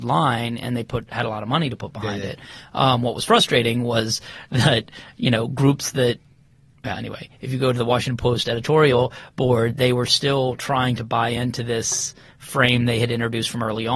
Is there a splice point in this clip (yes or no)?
no